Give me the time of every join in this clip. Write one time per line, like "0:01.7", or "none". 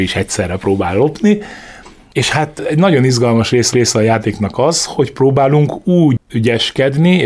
0:03.7